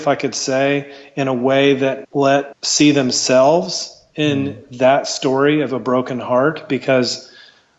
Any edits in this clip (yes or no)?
yes